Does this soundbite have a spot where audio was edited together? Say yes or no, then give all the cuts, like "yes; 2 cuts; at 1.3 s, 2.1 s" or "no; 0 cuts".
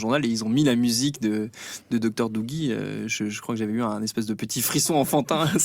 no; 0 cuts